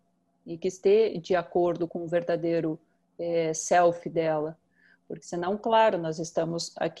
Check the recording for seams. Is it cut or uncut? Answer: cut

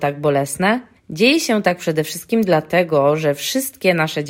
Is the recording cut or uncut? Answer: uncut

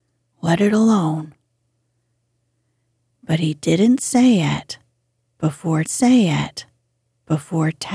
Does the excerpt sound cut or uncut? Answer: cut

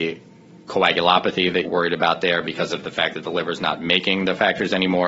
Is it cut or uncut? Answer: cut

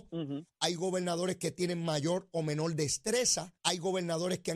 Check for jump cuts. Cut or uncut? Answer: cut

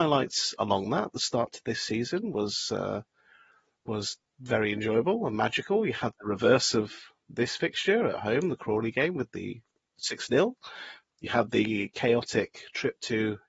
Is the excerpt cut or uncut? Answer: uncut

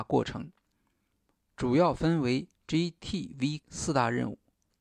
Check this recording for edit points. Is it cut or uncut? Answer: cut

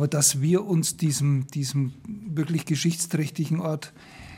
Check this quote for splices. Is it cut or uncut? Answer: uncut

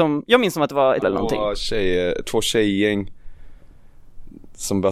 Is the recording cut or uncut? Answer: cut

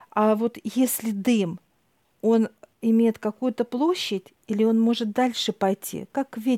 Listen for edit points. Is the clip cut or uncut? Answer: uncut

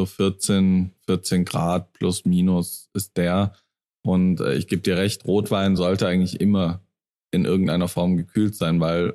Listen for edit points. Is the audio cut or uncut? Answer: uncut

